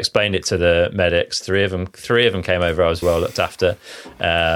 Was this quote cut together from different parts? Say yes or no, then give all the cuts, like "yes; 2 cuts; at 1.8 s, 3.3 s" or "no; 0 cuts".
yes; 1 cut; at 3.0 s